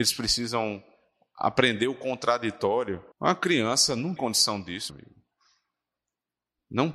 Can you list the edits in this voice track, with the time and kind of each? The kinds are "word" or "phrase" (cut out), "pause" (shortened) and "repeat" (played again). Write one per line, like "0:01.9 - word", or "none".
0:03.1 - pause
0:04.2 - word
0:04.9 - word